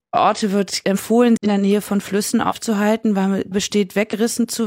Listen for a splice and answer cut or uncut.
cut